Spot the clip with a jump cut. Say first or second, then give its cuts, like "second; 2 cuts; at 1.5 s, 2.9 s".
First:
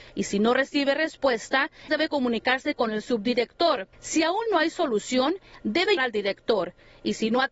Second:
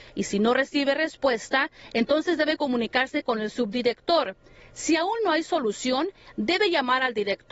first; 3 cuts; at 1.9 s, 3.9 s, 6.0 s